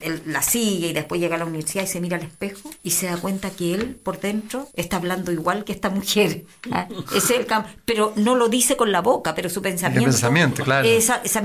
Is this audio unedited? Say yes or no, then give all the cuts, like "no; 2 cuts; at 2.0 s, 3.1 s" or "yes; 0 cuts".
no; 2 cuts; at 2.8 s, 4.7 s